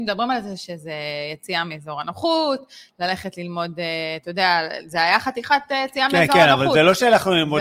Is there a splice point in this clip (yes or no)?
no